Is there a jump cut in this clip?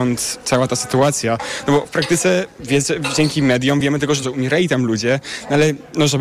yes; 1 cut; at 4.2 s

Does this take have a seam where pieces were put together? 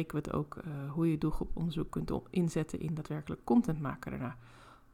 no; 0 cuts

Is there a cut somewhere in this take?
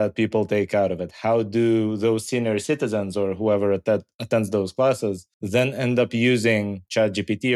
yes; 1 cut; at 5.3 s

